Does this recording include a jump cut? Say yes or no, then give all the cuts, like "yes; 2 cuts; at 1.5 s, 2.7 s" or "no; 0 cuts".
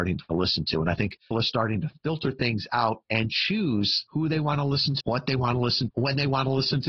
yes; 3 cuts; at 1.3 s, 5.0 s, 5.9 s